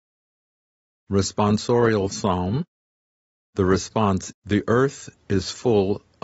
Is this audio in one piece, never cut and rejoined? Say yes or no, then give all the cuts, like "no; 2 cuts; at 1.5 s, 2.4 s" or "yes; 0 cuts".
no; 1 cut; at 4.3 s